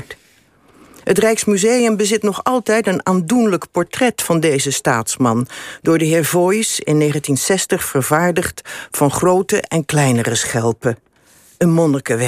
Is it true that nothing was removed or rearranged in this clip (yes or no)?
yes